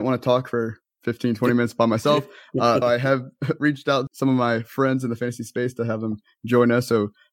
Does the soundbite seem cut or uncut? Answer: cut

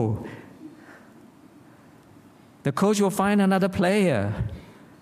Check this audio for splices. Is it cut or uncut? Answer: uncut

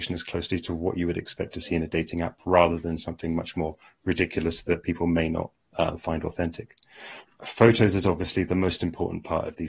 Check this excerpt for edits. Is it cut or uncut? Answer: uncut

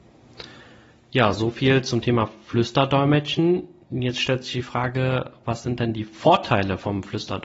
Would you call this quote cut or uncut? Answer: uncut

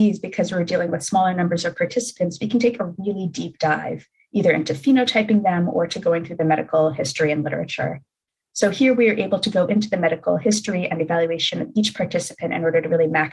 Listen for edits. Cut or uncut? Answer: uncut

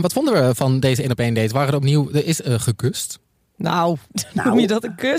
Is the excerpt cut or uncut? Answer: uncut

